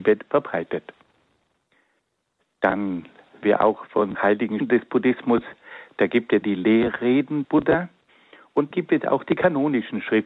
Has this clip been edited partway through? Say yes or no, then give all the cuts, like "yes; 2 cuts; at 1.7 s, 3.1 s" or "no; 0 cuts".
yes; 6 cuts; at 3.4 s, 4.1 s, 4.6 s, 6.4 s, 7.4 s, 8.7 s